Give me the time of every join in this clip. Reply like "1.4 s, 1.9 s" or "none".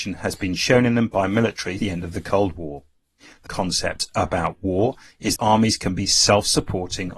1.8 s, 3.5 s, 5.4 s